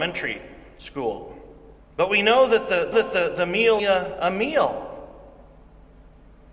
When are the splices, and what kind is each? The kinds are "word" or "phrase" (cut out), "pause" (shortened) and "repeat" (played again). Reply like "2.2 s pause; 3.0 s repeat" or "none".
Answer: 1.8 s pause; 2.9 s repeat; 3.8 s phrase

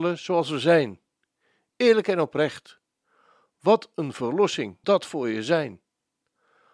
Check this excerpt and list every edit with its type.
4.8 s word

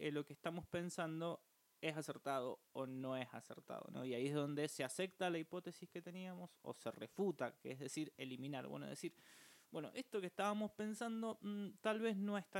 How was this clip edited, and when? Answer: none

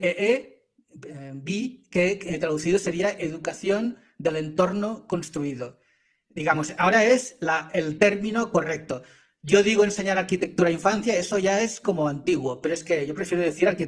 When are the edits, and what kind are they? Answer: none

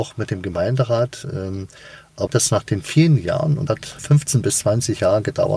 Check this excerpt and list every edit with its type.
2.3 s phrase; 3.7 s word; 4.0 s word

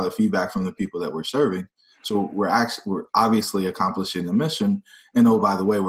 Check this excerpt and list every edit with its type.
none

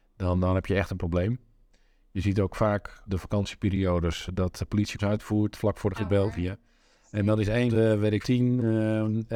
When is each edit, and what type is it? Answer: 3.1 s word; 5.0 s word; 5.5 s word; 5.9 s word; 7.7 s word; 8.2 s word

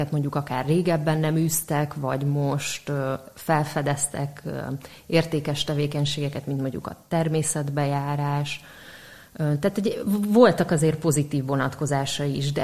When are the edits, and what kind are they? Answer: none

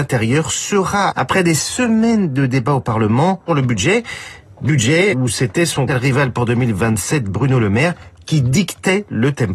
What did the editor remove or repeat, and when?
1.1 s phrase; 3.5 s word; 5.1 s word; 5.9 s phrase

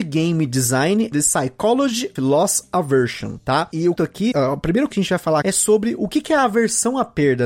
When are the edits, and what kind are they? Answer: 1.1 s word; 2.2 s word; 4.0 s word; 4.3 s word; 4.9 s word; 5.4 s word

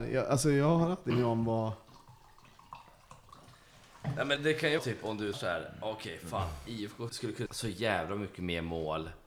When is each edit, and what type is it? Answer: 1.1 s word; 4.4 s word; 4.8 s word; 5.3 s word; 7.1 s word; 7.5 s word

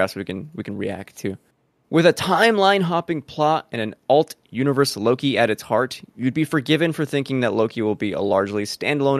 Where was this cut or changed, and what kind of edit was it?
1.5 s pause

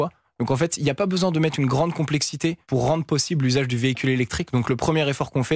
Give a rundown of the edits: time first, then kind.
2.6 s pause

